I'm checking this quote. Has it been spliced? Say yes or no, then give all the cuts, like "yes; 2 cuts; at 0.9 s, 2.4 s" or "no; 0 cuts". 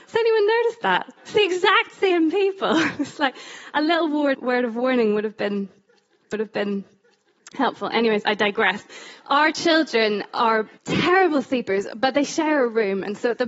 yes; 5 cuts; at 1.2 s, 4.3 s, 6.3 s, 9.2 s, 10.8 s